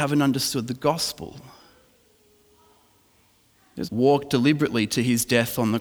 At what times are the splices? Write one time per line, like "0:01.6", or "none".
0:03.8